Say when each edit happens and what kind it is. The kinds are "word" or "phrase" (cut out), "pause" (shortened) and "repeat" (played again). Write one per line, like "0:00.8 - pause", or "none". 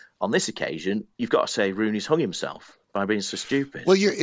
0:01.1 - pause